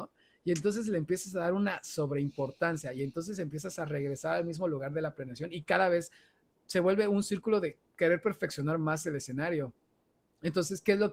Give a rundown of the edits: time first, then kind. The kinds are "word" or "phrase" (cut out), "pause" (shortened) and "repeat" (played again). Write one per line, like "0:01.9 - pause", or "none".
none